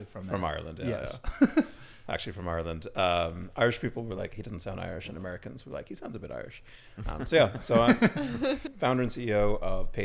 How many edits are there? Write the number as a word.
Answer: zero